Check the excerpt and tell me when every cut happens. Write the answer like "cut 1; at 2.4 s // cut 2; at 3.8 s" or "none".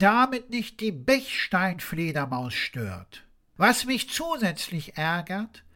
none